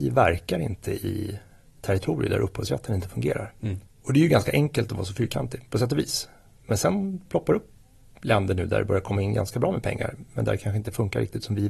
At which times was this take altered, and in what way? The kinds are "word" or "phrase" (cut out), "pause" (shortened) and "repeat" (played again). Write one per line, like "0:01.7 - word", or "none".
none